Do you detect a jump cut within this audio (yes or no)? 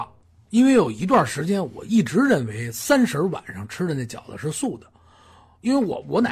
no